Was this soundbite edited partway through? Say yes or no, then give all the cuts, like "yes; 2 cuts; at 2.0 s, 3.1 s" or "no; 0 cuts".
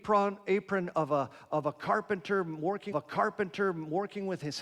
yes; 1 cut; at 2.9 s